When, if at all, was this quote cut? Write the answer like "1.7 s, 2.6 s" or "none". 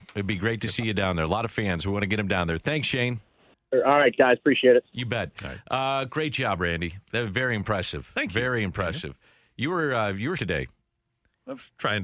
10.3 s